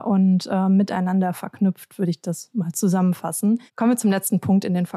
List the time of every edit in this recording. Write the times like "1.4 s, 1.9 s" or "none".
3.7 s